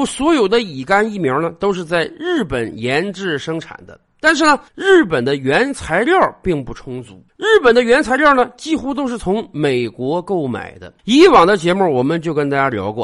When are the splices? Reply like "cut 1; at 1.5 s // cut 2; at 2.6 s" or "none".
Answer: cut 1; at 4.7 s // cut 2; at 7.3 s // cut 3; at 11.0 s